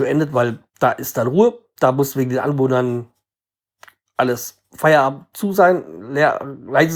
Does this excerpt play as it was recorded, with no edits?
no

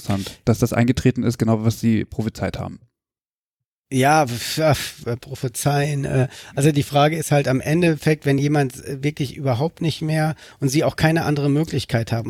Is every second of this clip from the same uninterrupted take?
yes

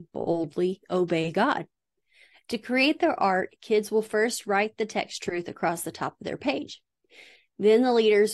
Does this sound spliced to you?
no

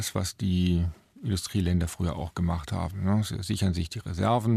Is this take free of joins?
yes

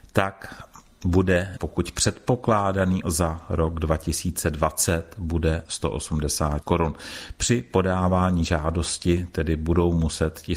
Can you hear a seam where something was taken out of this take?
yes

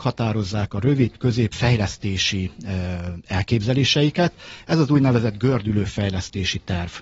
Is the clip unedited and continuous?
no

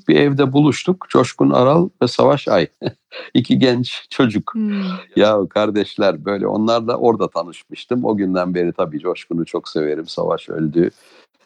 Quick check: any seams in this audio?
yes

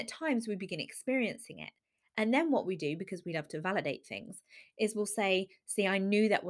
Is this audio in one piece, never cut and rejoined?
yes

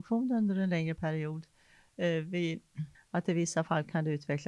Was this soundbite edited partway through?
yes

